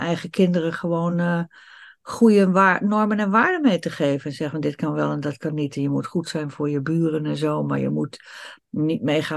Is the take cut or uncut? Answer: uncut